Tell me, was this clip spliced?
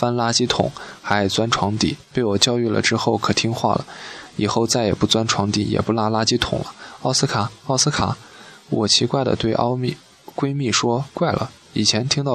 yes; 1 cut; at 2.0 s

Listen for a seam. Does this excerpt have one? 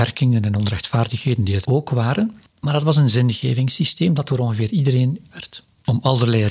yes; 2 cuts; at 1.6 s, 5.3 s

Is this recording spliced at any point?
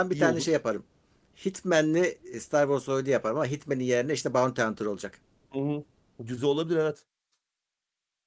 no; 0 cuts

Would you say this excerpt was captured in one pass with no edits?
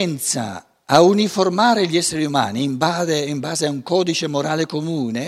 yes; 0 cuts

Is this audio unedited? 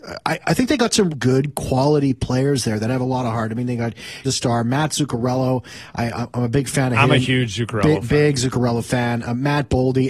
no; 2 cuts; at 1.1 s, 4.2 s

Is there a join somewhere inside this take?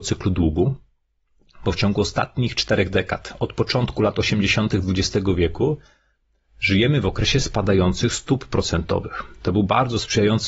no; 0 cuts

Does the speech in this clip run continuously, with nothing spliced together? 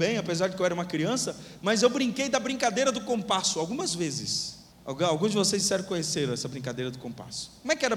no; 1 cut; at 4.7 s

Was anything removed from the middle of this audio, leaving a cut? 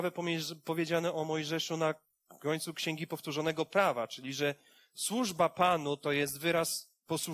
no; 0 cuts

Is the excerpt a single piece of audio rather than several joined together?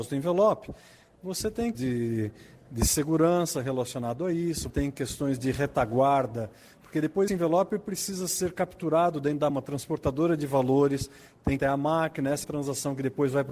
no; 6 cuts; at 1.7 s, 4.7 s, 7.3 s, 9.5 s, 11.6 s, 12.4 s

